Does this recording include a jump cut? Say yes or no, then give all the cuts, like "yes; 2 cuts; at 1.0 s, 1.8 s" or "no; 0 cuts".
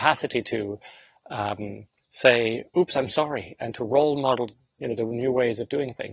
no; 0 cuts